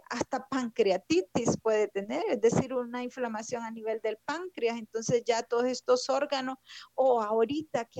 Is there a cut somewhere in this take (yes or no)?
no